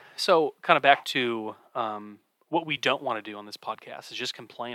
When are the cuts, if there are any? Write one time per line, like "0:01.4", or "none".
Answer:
none

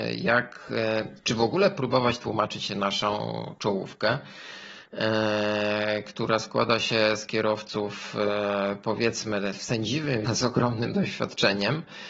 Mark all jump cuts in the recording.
0:10.3

